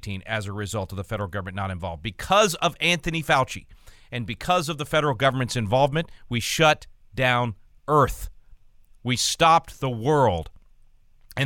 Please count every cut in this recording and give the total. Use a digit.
0